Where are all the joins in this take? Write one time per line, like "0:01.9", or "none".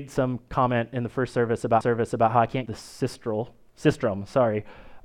0:01.8
0:02.7